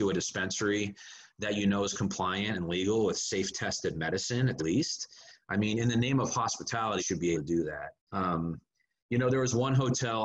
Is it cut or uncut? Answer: cut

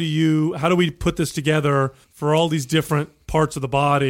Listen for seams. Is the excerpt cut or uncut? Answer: cut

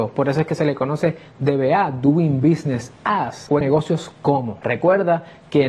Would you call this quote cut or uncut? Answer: cut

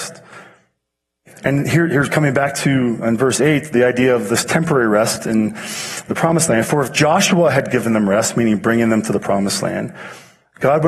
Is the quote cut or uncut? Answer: uncut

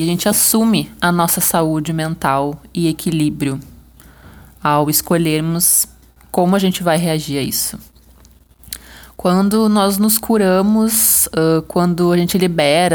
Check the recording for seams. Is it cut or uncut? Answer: uncut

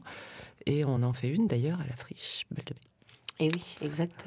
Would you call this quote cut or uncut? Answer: uncut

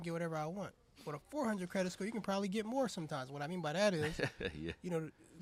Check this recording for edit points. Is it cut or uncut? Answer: uncut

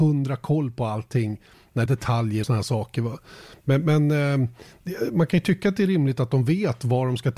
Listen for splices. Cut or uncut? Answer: cut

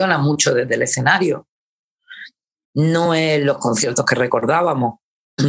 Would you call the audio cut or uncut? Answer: uncut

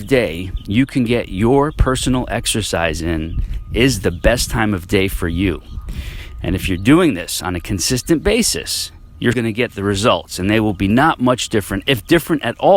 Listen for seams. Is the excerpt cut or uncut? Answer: cut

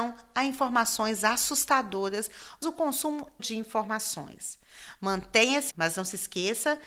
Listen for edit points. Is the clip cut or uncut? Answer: cut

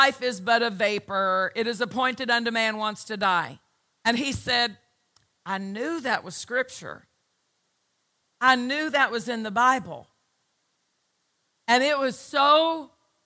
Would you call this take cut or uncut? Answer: uncut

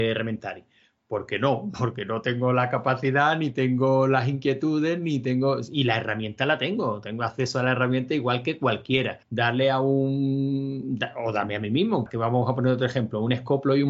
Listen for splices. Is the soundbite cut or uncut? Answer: cut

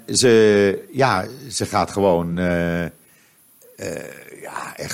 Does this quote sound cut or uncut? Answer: uncut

